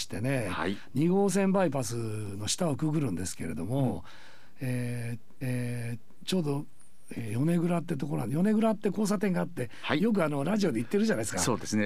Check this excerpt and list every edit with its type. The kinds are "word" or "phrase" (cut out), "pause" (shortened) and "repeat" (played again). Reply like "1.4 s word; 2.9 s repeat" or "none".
5.4 s repeat